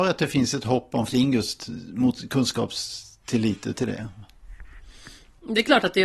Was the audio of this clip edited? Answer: yes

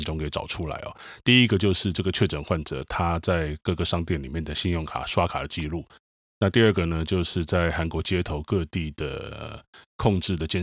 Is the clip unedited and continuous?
yes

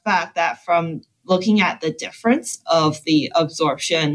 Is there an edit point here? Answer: no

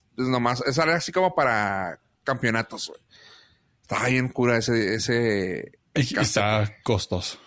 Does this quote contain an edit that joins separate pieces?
no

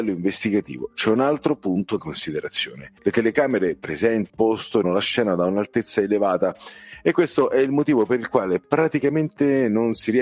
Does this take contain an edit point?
yes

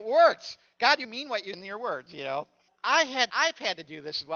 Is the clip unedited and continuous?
no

